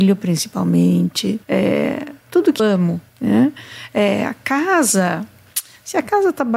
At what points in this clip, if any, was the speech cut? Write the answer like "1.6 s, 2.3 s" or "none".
1.4 s, 2.6 s, 3.1 s